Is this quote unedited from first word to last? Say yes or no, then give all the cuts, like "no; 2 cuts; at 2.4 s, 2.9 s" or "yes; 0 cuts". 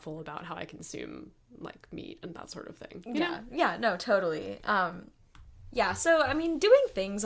yes; 0 cuts